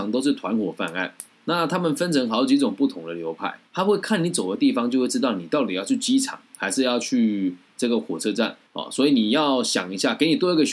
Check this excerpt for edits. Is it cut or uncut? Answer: cut